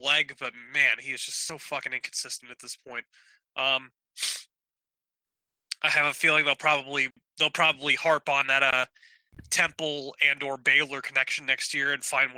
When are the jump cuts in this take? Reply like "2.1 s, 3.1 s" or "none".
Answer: none